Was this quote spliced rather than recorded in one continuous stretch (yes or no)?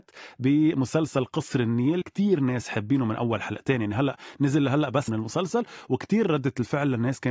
yes